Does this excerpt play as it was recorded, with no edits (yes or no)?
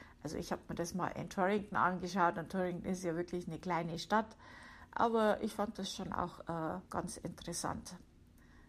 no